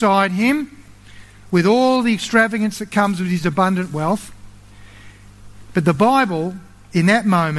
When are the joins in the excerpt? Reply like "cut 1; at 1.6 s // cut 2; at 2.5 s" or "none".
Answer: none